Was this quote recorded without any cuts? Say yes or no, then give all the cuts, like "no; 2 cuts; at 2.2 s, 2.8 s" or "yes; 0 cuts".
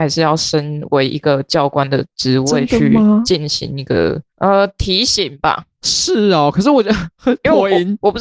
no; 1 cut; at 5.7 s